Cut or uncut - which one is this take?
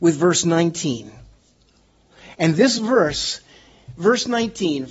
uncut